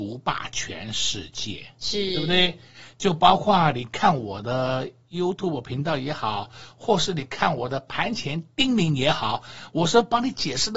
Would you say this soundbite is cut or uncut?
uncut